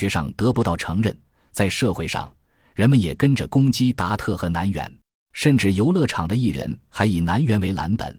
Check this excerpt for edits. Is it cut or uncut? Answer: cut